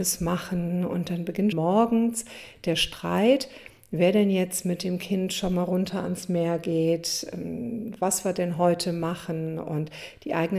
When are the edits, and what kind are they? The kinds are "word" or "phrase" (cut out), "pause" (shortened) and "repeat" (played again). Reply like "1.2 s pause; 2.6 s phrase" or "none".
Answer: 1.5 s word